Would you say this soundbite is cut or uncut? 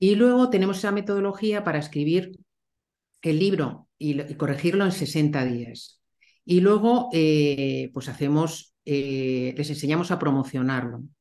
uncut